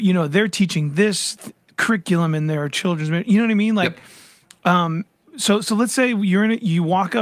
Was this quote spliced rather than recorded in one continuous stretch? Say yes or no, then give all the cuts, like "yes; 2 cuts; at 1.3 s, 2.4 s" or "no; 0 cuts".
no; 0 cuts